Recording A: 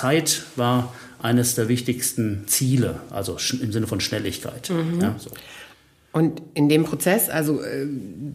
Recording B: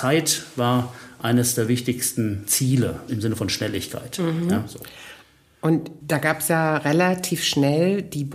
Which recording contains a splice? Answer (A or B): B